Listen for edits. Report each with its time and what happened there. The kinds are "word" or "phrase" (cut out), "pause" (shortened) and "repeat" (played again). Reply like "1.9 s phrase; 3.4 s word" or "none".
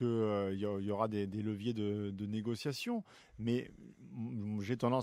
none